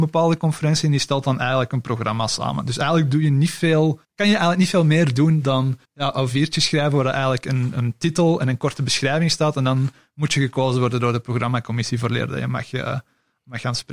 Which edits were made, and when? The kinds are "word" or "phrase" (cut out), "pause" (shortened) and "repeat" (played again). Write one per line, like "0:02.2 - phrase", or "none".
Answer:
0:04.0 - pause
0:05.9 - pause